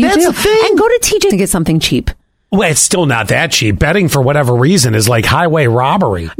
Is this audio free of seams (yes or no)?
no